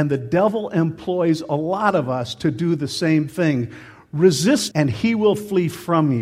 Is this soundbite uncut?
no; 1 cut; at 4.7 s

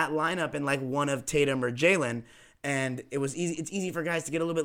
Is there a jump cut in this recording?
no; 0 cuts

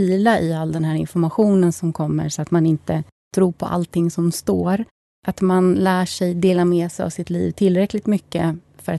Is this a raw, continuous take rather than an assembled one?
yes; 0 cuts

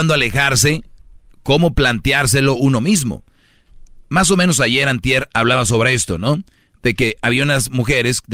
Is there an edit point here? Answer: no; 0 cuts

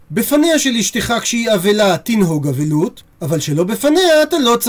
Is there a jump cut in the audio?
no; 0 cuts

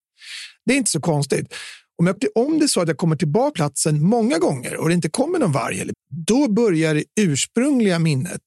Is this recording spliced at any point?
yes; 3 cuts; at 2.2 s, 3.5 s, 5.9 s

